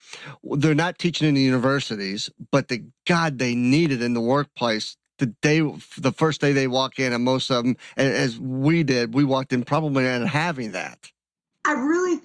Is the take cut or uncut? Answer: uncut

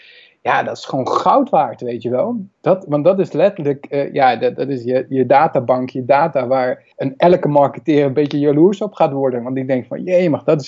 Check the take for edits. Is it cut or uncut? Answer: cut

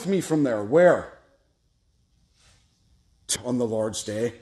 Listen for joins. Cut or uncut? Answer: cut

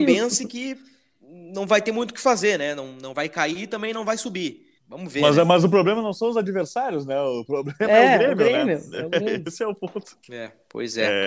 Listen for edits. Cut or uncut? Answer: cut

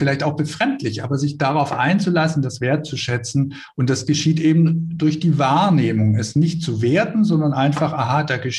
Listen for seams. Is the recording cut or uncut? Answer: uncut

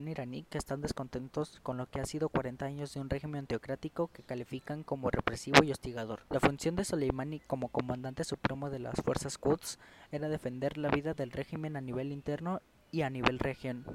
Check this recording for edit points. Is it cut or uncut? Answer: uncut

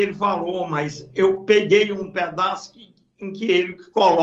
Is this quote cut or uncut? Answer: uncut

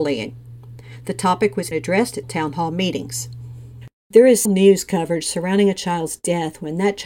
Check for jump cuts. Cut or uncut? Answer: cut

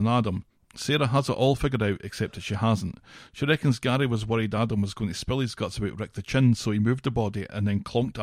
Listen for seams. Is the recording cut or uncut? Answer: uncut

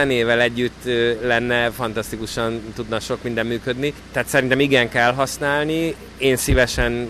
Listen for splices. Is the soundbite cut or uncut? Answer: uncut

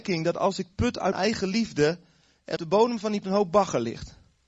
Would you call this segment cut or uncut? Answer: cut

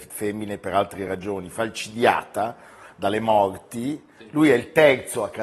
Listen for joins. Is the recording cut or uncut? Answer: uncut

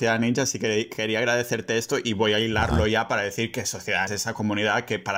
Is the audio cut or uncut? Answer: cut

